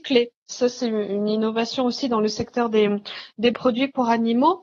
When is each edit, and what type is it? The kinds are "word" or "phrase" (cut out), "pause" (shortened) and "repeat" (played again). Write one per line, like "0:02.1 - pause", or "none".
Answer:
none